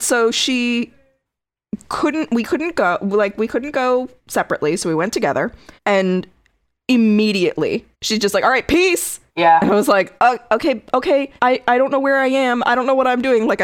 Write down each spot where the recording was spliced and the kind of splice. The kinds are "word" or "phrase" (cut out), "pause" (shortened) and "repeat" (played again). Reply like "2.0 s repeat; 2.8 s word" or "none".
4.2 s pause; 5.8 s pause; 7.9 s pause; 9.3 s pause; 10.2 s pause; 11.4 s pause